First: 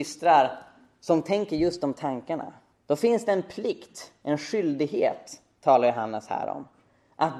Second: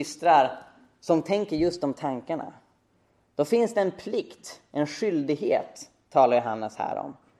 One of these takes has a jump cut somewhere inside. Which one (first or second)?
first